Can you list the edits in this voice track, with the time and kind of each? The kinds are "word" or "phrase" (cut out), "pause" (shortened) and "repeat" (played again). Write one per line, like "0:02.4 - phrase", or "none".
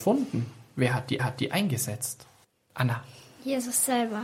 0:01.2 - repeat